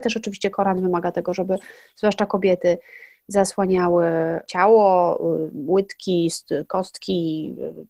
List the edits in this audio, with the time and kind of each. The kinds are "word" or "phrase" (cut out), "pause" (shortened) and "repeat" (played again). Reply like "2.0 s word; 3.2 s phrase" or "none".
none